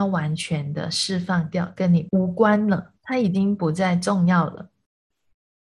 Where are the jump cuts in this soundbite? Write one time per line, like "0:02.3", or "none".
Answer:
0:03.0